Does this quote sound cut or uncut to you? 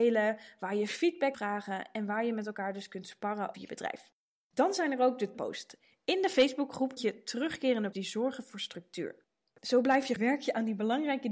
cut